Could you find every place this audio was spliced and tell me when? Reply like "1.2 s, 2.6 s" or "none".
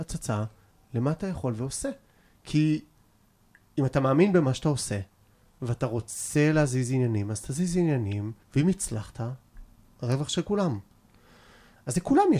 8.4 s

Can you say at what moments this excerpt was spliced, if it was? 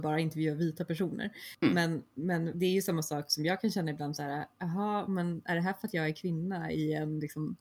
2.5 s

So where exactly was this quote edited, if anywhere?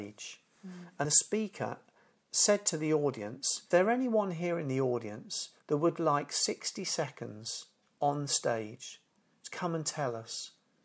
1.0 s, 3.7 s, 5.6 s

